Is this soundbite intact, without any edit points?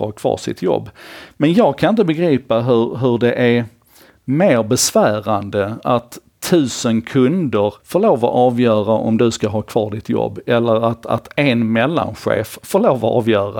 no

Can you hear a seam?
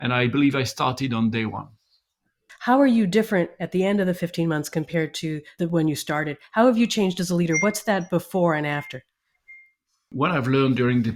no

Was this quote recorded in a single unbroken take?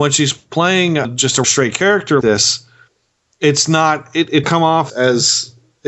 no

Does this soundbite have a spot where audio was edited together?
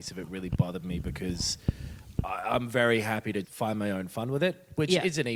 yes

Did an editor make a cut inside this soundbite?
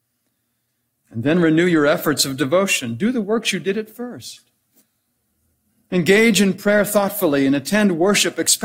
no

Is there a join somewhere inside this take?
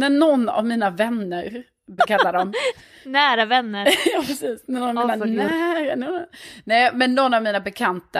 yes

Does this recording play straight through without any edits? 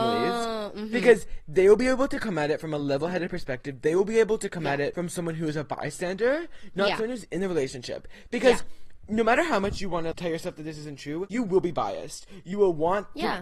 yes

